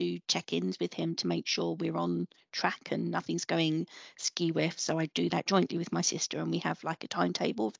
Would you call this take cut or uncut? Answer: uncut